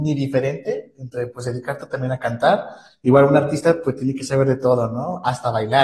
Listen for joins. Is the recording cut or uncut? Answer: uncut